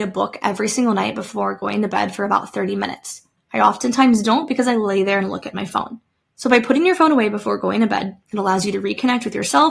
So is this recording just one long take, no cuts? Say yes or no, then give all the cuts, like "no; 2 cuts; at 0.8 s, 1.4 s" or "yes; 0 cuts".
no; 1 cut; at 6.2 s